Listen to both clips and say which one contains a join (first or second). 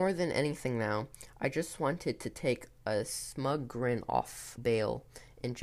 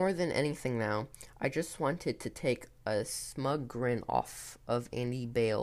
first